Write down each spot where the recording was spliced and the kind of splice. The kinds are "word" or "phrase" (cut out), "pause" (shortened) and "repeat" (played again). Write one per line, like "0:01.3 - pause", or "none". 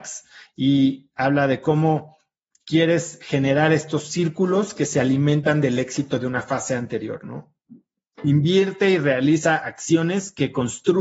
none

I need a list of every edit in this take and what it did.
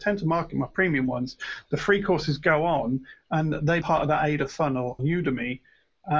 0:03.8 - word
0:05.0 - word

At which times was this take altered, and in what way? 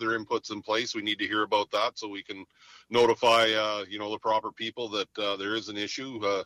none

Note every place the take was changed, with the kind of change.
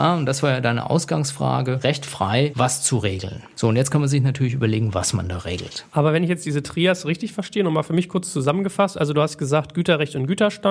0:05.9 - pause

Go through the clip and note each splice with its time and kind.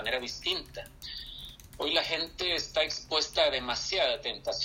none

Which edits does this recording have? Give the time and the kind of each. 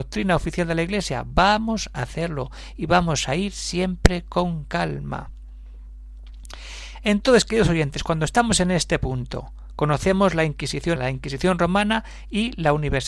0:11.0 - word

